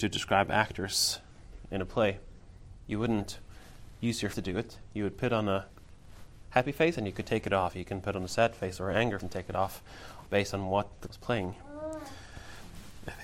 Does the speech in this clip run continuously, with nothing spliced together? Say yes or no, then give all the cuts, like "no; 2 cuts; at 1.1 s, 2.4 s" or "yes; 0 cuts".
no; 4 cuts; at 4.3 s, 9.2 s, 10.3 s, 11.1 s